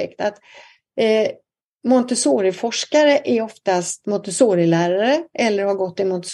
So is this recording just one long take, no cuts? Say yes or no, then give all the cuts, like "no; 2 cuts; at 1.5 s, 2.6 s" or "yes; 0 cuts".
no; 1 cut; at 4.0 s